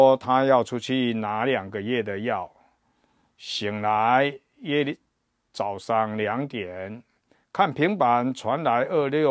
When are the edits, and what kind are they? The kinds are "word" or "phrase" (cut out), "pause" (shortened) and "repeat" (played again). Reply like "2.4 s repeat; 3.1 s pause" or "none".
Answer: none